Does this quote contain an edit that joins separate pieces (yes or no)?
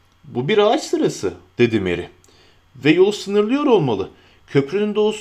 no